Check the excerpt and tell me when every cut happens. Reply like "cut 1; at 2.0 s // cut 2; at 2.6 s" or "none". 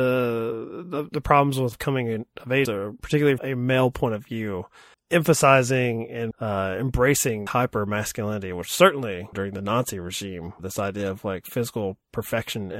cut 1; at 1.7 s // cut 2; at 2.7 s // cut 3; at 3.4 s // cut 4; at 4.9 s // cut 5; at 6.3 s // cut 6; at 7.5 s // cut 7; at 9.3 s // cut 8; at 10.6 s